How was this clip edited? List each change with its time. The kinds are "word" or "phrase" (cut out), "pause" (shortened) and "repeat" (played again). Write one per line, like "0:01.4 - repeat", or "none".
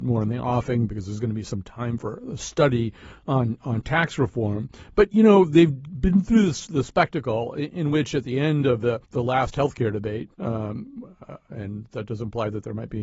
0:09.0 - pause
0:10.3 - pause